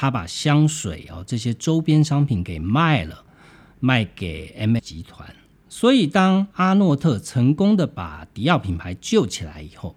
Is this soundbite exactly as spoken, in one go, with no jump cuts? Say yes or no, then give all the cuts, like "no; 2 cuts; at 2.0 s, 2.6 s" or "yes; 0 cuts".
no; 2 cuts; at 4.8 s, 6.5 s